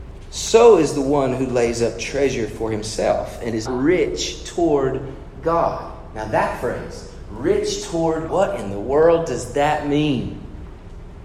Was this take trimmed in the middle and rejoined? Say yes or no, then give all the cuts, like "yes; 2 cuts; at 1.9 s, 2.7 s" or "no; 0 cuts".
yes; 2 cuts; at 3.7 s, 8.3 s